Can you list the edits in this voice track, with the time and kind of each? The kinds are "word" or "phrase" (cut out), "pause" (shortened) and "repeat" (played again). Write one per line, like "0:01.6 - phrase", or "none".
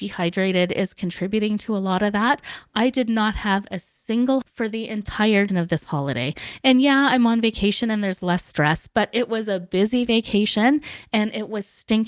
0:04.4 - word
0:05.5 - word